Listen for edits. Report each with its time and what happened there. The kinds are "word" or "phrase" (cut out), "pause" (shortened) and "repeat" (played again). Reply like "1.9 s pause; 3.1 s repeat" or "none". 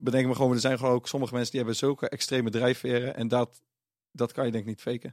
none